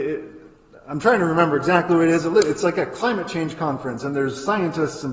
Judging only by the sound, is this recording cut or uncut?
uncut